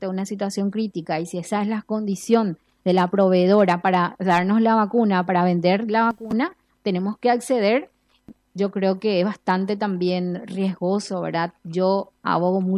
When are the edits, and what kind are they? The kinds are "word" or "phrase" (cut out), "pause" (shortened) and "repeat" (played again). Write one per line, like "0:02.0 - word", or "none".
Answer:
0:08.4 - pause
0:11.6 - pause